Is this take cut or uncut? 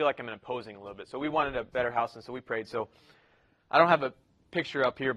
uncut